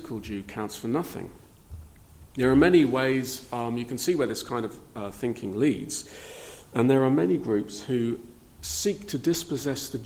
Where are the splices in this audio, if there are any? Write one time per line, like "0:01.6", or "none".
none